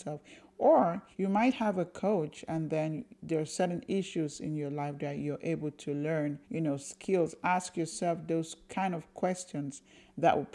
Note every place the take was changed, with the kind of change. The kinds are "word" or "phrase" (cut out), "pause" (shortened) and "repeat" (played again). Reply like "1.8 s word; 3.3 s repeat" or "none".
1.1 s pause; 6.4 s pause